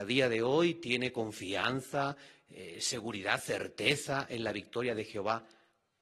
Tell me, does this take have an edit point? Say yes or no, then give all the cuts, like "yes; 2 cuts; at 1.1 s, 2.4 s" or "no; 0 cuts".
no; 0 cuts